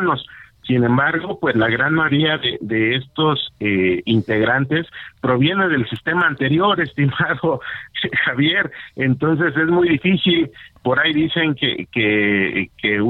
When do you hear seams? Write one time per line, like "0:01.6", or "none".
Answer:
none